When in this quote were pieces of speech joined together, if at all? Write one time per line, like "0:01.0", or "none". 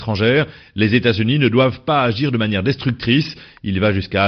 none

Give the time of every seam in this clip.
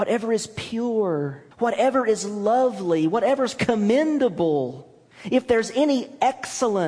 0:01.5
0:05.1

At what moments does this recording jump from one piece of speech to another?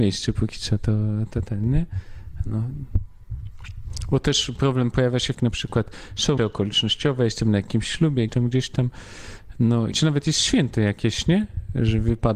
0:05.3
0:06.4
0:08.3
0:09.9

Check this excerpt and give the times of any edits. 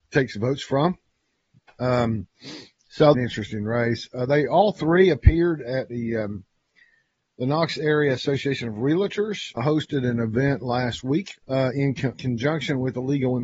0:03.1
0:09.6
0:11.4
0:12.1

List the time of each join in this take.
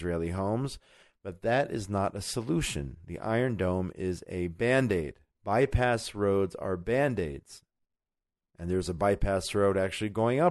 0:05.3
0:08.0

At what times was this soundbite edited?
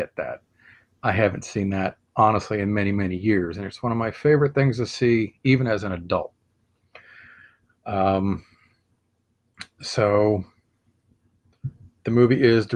none

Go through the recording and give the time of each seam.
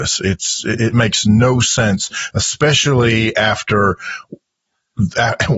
none

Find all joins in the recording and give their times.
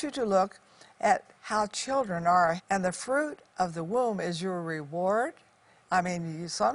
0:02.6

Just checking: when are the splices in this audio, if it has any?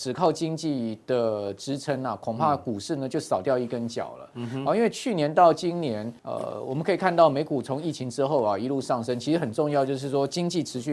0:06.2

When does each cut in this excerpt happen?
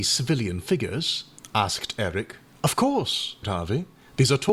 0:02.5
0:03.4

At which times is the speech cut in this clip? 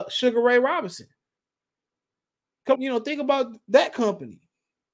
0:02.7

